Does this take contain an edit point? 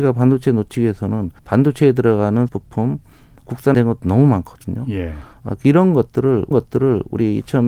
yes; 4 cuts; at 1.4 s, 2.5 s, 3.7 s, 6.5 s

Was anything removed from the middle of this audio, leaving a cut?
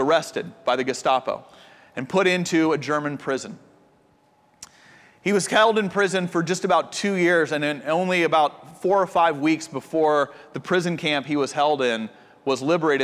no; 0 cuts

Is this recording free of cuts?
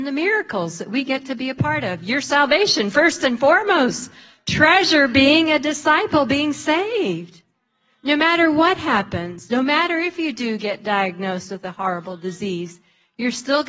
yes; 0 cuts

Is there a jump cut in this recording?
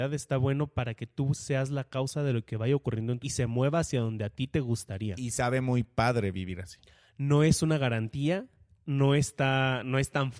yes; 1 cut; at 3.2 s

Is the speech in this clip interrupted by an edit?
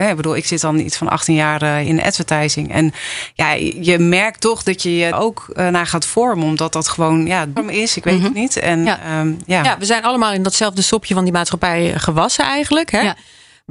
yes; 2 cuts; at 5.1 s, 7.6 s

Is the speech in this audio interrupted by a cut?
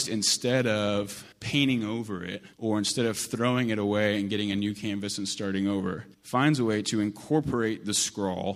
yes; 3 cuts; at 1.3 s, 2.5 s, 6.1 s

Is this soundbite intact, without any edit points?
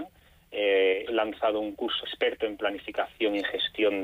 no; 2 cuts; at 1.1 s, 2.0 s

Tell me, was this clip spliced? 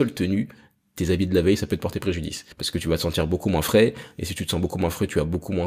yes; 1 cut; at 2.5 s

